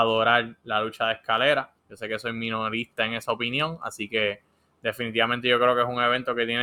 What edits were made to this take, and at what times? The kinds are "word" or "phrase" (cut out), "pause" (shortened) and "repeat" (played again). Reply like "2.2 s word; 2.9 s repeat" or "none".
1.8 s pause